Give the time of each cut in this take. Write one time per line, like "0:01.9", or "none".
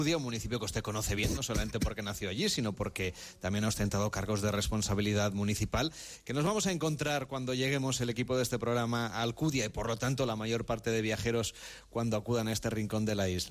none